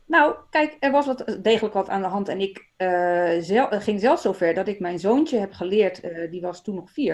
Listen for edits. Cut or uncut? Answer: uncut